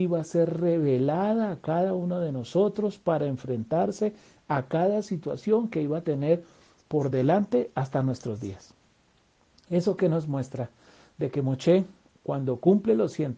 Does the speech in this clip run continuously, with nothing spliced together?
yes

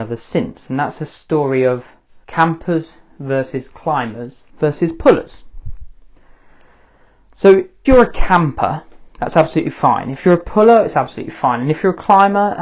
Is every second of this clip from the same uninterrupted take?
no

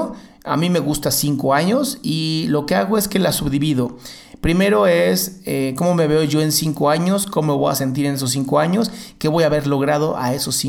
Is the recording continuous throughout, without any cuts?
yes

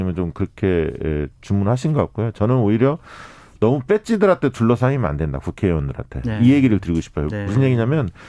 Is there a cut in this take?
no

